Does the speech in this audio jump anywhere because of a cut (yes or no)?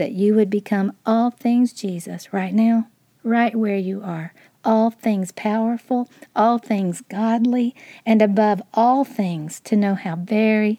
yes